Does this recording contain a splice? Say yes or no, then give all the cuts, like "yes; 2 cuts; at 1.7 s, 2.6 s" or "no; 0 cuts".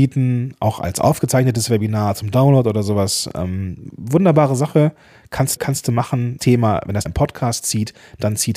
yes; 3 cuts; at 5.6 s, 6.4 s, 7.1 s